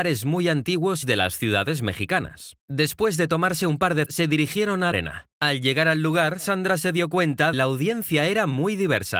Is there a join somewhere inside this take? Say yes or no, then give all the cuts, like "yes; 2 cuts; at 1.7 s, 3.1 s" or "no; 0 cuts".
yes; 6 cuts; at 1.0 s, 2.6 s, 4.1 s, 4.9 s, 5.3 s, 7.5 s